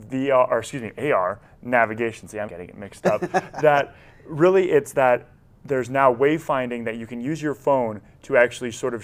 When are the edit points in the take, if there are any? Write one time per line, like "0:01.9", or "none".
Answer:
0:02.5